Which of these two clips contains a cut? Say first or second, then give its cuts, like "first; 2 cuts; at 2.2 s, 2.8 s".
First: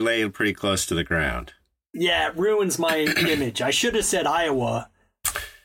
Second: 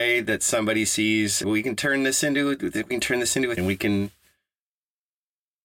second; 2 cuts; at 1.4 s, 3.6 s